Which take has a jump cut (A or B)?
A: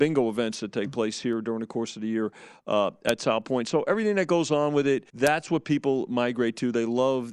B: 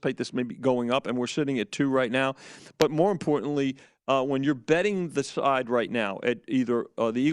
A